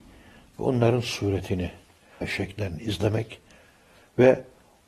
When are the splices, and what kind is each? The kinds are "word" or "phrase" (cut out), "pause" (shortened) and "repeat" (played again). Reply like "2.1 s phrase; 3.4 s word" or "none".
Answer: 2.2 s word